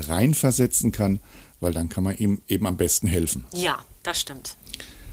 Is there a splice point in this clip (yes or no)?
no